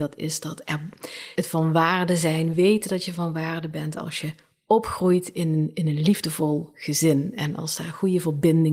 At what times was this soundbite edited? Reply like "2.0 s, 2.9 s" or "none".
1.4 s